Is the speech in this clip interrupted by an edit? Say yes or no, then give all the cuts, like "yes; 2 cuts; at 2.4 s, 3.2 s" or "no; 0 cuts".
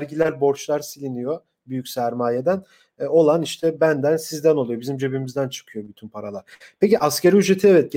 no; 0 cuts